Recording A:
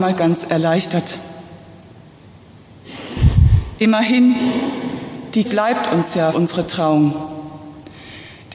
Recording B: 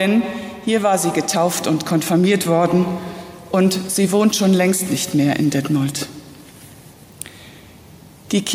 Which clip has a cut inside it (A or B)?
A